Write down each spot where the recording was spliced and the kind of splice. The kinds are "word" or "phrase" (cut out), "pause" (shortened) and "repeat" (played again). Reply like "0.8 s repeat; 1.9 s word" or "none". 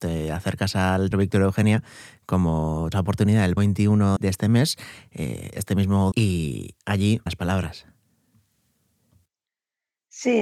1.1 s word; 2.9 s word; 3.6 s word; 4.2 s word; 6.1 s word; 7.3 s word